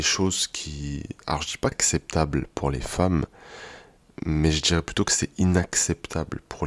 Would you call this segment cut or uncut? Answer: cut